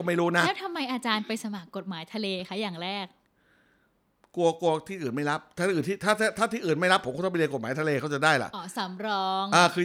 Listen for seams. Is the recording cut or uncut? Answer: uncut